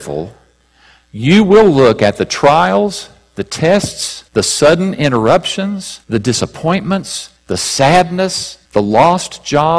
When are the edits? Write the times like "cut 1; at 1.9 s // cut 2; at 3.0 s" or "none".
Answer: cut 1; at 4.3 s // cut 2; at 6.0 s // cut 3; at 7.4 s // cut 4; at 8.6 s